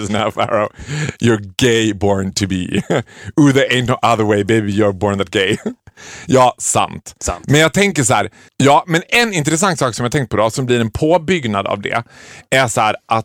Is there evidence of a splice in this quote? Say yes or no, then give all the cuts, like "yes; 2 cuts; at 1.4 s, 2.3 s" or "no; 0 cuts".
yes; 1 cut; at 5.8 s